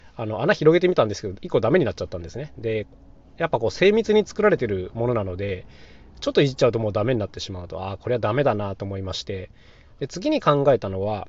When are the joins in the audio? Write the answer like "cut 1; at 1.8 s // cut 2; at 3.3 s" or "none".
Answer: none